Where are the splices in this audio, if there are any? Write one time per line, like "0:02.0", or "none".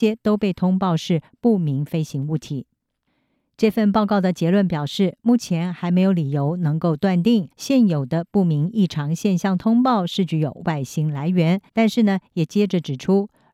0:07.5
0:11.7